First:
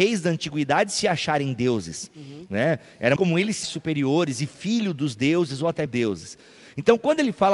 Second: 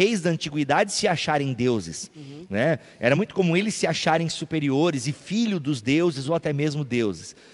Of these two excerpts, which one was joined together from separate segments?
first; 3 cuts; at 3.2 s, 3.6 s, 5.9 s

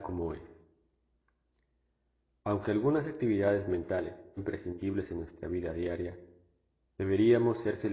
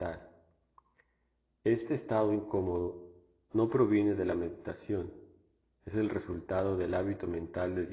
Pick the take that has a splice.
first; 1 cut; at 4.4 s

